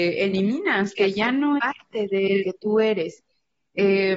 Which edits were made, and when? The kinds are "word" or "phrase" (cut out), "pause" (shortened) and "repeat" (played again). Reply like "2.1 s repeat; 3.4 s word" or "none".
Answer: 1.0 s word; 1.6 s word; 2.4 s word